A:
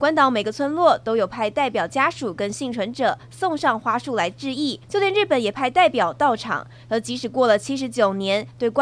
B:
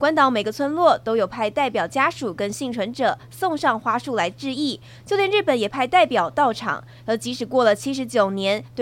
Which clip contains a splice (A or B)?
A